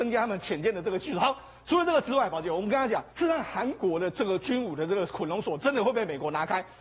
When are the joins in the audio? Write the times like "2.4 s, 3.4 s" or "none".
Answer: 3.1 s

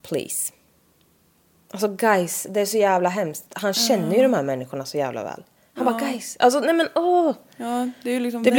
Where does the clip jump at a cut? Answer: none

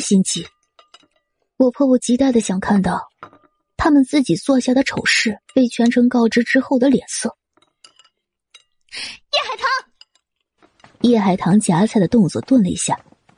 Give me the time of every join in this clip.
5.5 s, 11.0 s

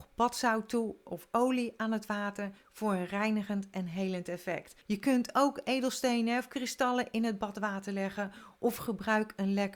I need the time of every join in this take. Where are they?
4.8 s

